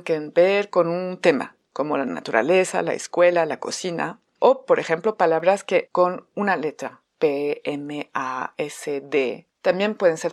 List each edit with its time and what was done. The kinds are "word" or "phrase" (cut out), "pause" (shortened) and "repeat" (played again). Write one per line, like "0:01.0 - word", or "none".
0:01.6 - pause
0:05.9 - word